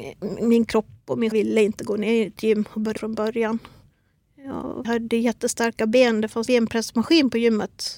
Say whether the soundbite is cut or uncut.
cut